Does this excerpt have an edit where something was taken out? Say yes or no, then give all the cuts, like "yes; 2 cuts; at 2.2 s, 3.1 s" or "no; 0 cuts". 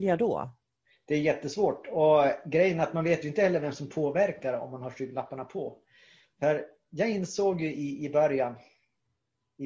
no; 0 cuts